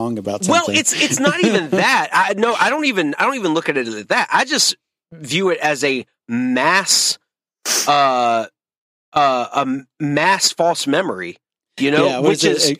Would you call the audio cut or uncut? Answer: uncut